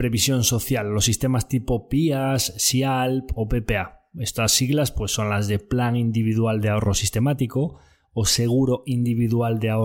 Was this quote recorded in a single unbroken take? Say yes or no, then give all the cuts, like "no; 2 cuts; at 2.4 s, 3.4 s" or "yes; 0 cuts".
yes; 0 cuts